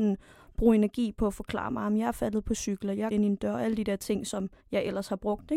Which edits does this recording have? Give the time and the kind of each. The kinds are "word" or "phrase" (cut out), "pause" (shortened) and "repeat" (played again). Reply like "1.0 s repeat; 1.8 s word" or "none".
3.1 s word; 4.6 s pause